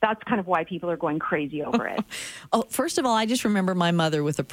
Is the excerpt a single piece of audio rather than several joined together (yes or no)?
yes